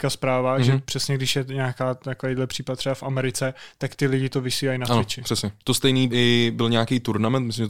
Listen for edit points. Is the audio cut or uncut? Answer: cut